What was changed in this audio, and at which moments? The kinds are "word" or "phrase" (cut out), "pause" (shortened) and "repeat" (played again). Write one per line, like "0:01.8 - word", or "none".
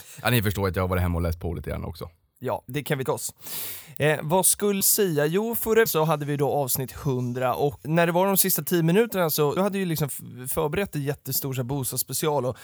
0:02.7 - word
0:03.1 - word
0:04.8 - word
0:05.9 - word
0:07.8 - word
0:09.6 - word